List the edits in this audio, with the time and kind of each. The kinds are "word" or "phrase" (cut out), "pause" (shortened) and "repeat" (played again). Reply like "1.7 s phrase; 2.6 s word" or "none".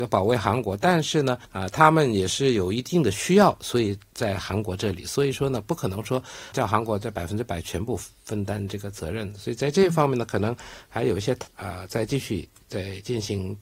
1.5 s pause; 6.5 s phrase; 11.5 s pause